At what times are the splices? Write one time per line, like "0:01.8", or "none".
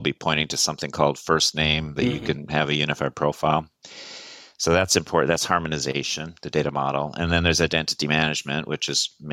0:02.0

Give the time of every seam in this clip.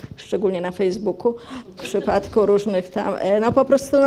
0:01.8

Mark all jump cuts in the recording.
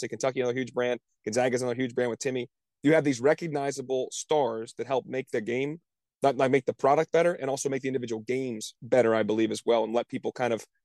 none

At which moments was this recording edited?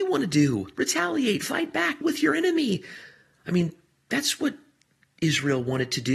0:02.0

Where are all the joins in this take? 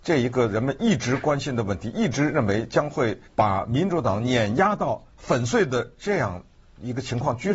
0:03.3
0:05.1

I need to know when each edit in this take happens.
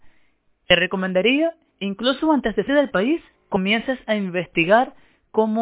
0:01.7
0:02.7
0:03.4

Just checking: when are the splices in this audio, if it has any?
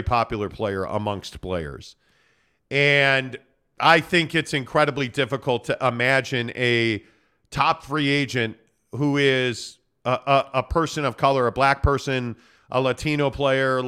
none

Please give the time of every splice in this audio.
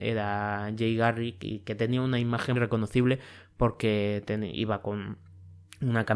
0:02.6

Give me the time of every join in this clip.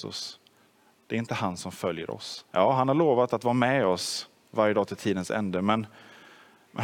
0:02.5

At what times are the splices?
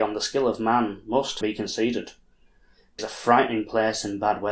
0:01.4
0:03.0

